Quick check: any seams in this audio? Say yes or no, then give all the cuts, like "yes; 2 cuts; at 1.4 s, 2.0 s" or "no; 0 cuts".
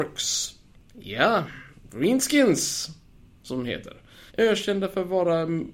yes; 1 cut; at 4.3 s